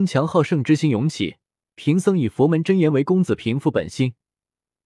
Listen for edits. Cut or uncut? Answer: cut